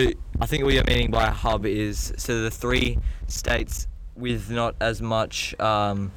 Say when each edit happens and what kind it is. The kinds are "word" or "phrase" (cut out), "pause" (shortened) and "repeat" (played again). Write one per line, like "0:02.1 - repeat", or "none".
none